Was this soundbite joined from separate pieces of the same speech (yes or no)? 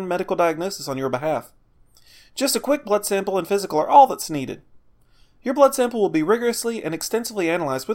no